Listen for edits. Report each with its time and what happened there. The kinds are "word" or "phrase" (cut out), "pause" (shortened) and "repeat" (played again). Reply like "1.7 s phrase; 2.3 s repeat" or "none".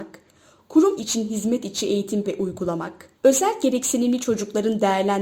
1.0 s word; 2.2 s word; 3.1 s pause